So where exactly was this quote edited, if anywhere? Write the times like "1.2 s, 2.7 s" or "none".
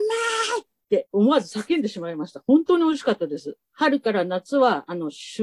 1.1 s, 3.6 s